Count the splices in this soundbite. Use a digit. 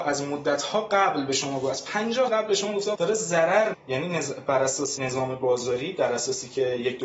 4